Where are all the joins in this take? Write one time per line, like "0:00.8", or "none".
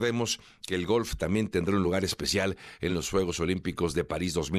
none

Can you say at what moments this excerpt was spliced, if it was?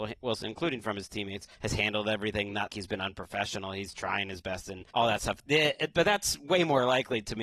0:01.5
0:02.7
0:04.9

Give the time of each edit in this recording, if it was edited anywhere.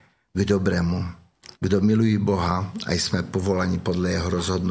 0:01.5

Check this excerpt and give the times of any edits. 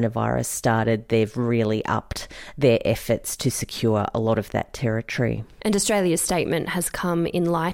none

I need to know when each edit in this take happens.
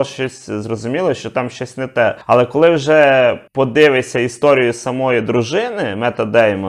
0:02.2
0:03.5

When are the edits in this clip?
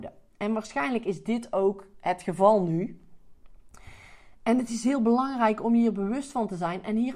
none

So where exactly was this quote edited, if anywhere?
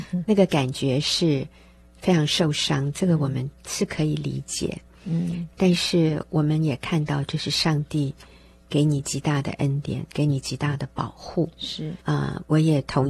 0:12.0

